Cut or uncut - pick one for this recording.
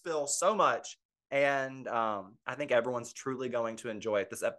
uncut